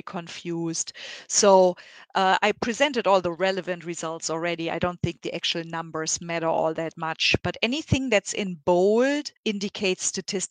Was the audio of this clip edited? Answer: yes; 1 cut; at 9.4 s

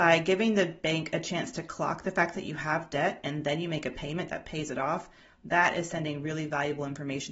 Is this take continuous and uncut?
yes; 0 cuts

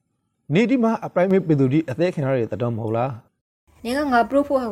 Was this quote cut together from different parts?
no; 0 cuts

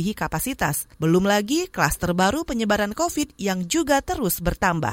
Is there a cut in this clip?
yes; 1 cut; at 0.9 s

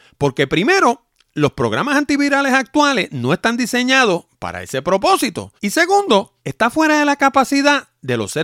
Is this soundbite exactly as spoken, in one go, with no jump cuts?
no; 2 cuts; at 5.6 s, 6.4 s

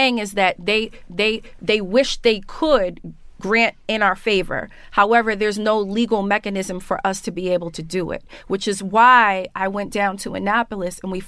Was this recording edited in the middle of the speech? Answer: yes; 1 cut; at 1.1 s

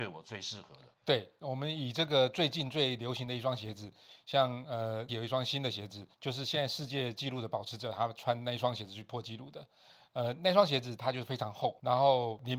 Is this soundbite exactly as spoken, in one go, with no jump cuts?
no; 3 cuts; at 0.9 s, 5.1 s, 6.1 s

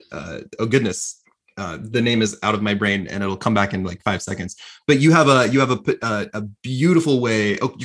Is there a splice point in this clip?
no; 0 cuts

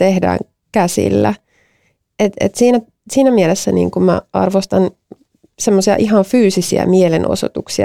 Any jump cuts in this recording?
no; 0 cuts

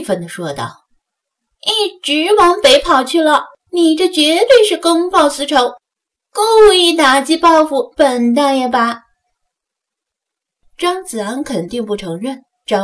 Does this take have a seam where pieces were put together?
yes; 1 cut; at 3.6 s

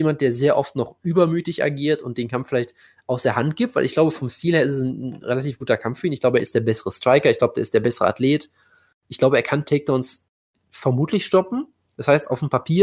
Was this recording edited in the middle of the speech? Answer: no; 0 cuts

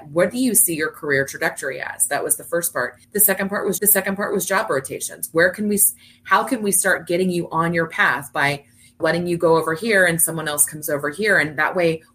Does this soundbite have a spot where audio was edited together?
yes; 3 cuts; at 3.0 s, 3.8 s, 9.0 s

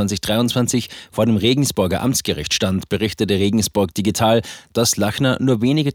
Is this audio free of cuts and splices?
yes; 0 cuts

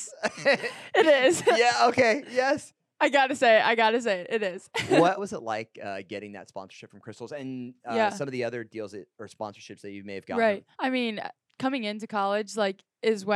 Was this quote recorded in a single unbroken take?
no; 2 cuts; at 5.2 s, 10.7 s

